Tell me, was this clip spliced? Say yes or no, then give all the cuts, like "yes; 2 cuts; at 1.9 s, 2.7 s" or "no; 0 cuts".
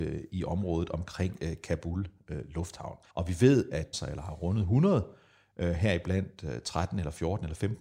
yes; 2 cuts; at 3.1 s, 3.9 s